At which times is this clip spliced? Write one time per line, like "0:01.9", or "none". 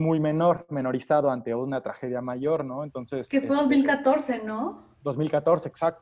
0:04.9

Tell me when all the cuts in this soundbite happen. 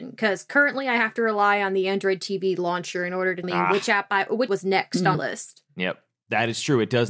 0:03.4
0:04.5
0:05.1
0:05.7

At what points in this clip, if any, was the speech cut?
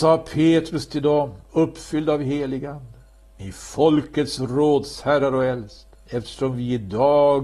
none

